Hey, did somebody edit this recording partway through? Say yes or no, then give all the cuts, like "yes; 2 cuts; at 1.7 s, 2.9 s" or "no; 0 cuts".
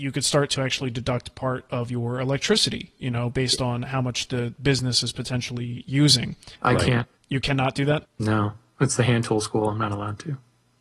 yes; 3 cuts; at 6.6 s, 7.2 s, 8.1 s